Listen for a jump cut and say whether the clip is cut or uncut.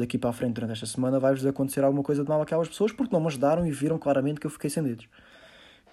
uncut